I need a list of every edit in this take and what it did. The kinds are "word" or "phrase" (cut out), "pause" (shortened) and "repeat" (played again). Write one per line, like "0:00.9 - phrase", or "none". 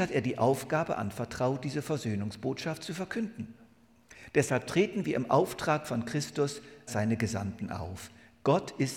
0:06.9 - word

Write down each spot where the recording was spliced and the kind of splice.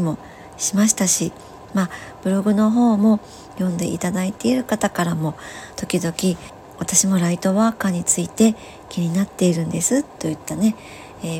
none

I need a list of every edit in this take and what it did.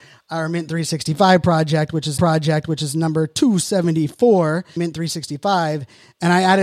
0:02.2 - repeat
0:04.8 - word

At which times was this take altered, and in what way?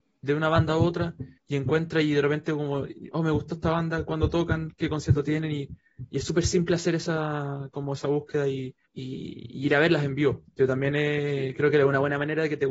0:01.4 - pause
0:08.9 - pause

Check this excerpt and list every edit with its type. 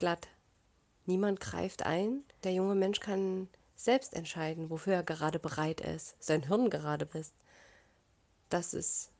0:02.4 - word
0:07.1 - word

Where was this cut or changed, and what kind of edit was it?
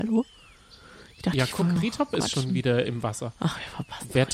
0:01.8 - word
0:02.8 - word

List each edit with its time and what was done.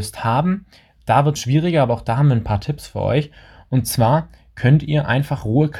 0:01.4 - phrase

